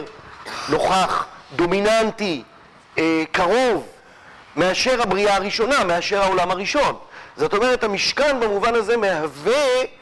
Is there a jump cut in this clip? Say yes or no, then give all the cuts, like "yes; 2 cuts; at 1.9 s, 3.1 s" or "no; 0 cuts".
no; 0 cuts